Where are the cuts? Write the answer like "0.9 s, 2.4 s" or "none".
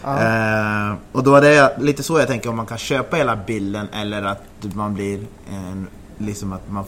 1.8 s